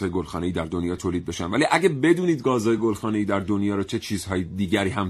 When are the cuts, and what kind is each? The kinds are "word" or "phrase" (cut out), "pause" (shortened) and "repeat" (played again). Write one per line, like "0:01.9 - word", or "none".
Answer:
none